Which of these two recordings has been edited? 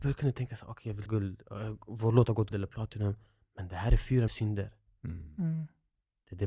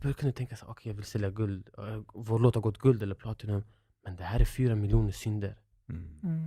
first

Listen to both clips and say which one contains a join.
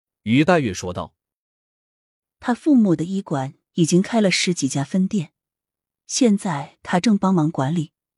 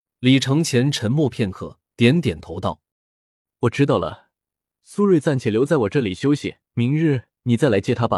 second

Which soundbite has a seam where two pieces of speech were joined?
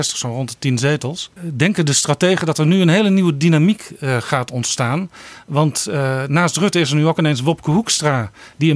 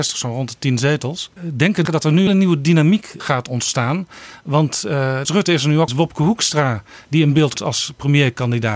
second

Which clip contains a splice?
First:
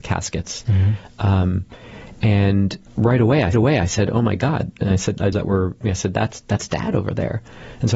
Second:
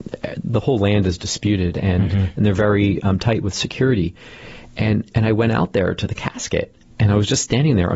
first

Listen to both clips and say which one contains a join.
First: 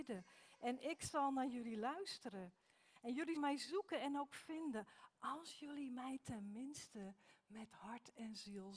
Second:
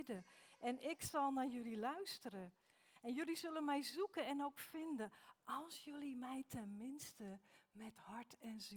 first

